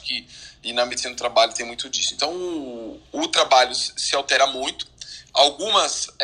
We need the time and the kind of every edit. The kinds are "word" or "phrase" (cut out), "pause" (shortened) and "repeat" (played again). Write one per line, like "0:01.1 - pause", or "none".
none